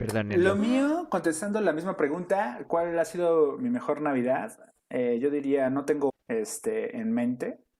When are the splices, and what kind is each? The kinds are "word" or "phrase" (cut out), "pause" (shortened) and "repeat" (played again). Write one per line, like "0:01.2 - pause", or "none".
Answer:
0:06.1 - word